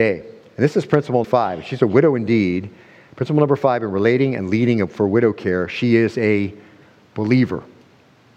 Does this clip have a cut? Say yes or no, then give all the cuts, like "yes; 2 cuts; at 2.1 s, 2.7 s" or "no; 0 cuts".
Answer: yes; 1 cut; at 1.2 s